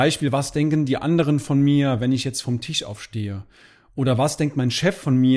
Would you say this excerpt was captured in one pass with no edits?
yes; 0 cuts

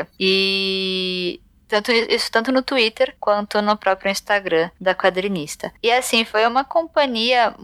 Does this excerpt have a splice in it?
no; 0 cuts

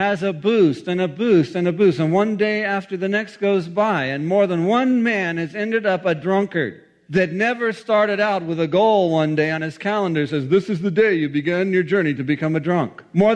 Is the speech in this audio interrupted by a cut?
no; 0 cuts

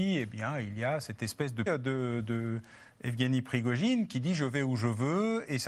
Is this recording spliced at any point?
yes; 1 cut; at 1.7 s

